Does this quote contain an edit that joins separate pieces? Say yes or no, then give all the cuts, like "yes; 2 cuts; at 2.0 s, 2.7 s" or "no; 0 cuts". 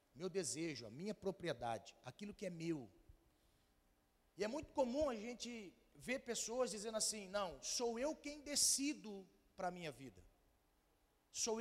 no; 0 cuts